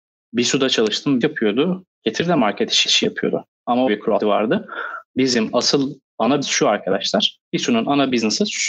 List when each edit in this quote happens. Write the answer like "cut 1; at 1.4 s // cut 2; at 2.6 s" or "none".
cut 1; at 1.2 s // cut 2; at 2.8 s // cut 3; at 3.9 s // cut 4; at 4.2 s // cut 5; at 6.4 s // cut 6; at 7.4 s